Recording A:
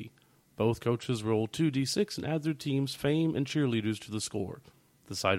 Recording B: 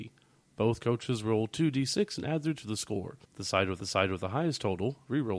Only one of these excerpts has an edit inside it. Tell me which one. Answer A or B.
B